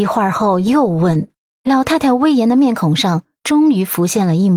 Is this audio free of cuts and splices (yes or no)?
no